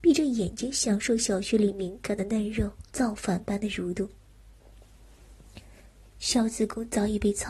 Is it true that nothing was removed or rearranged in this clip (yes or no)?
no